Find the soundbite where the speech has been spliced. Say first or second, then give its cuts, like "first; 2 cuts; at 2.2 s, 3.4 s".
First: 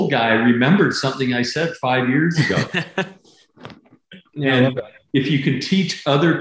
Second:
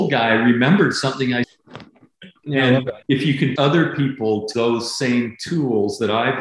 second; 4 cuts; at 1.4 s, 3.0 s, 3.6 s, 4.5 s